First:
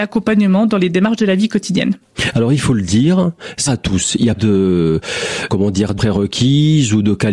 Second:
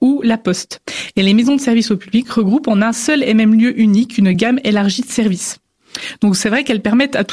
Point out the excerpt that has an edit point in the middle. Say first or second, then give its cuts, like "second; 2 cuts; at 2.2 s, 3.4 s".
first; 4 cuts; at 3.7 s, 4.4 s, 5.5 s, 6.0 s